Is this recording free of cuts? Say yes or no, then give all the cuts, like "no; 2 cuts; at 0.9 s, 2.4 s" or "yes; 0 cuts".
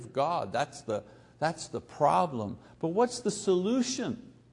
yes; 0 cuts